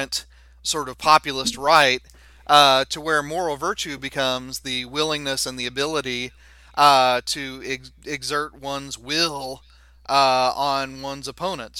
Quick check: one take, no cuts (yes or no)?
yes